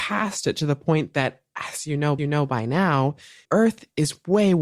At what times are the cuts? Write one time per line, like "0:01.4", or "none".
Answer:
0:02.2
0:03.4